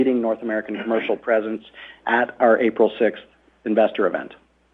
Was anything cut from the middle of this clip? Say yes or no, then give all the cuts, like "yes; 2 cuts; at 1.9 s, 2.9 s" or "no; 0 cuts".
no; 0 cuts